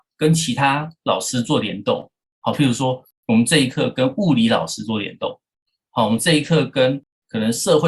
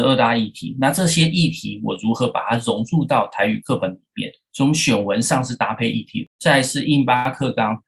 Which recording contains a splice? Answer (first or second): second